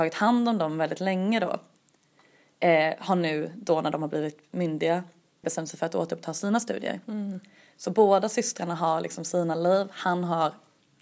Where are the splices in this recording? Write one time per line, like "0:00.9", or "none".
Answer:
0:05.4